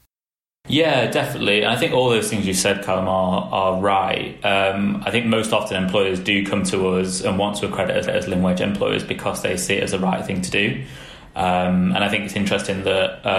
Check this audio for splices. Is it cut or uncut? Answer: cut